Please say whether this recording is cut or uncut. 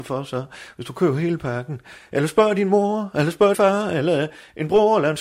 cut